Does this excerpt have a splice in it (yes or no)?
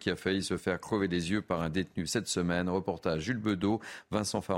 no